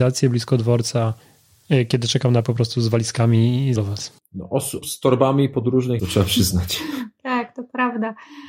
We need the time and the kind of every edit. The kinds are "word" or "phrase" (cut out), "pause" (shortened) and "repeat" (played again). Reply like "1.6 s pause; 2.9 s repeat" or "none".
2.4 s word; 3.8 s word; 4.8 s word; 6.0 s phrase